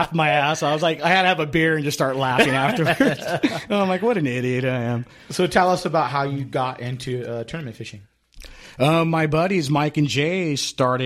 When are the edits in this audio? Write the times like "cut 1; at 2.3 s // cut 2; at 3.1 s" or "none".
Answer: none